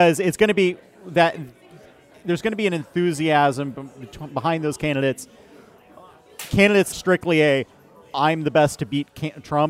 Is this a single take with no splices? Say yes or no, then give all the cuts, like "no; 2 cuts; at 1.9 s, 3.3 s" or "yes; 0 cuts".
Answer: no; 1 cut; at 6.9 s